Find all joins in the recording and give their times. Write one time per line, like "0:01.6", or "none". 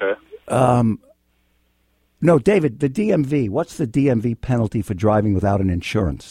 none